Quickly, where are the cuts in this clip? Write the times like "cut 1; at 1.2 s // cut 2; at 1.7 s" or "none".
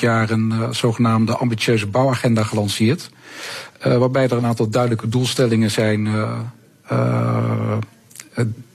none